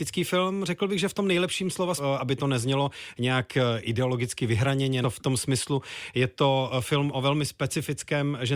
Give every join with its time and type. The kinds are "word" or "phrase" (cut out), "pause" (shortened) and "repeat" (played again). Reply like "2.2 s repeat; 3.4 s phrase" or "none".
2.0 s word; 5.0 s phrase